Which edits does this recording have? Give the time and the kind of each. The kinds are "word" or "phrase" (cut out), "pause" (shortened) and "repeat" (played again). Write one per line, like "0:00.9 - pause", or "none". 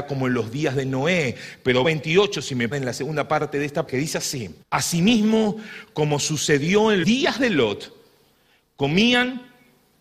0:01.8 - word
0:02.7 - phrase
0:03.9 - word
0:04.6 - pause
0:07.0 - word